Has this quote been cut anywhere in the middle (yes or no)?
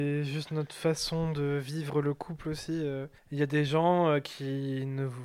yes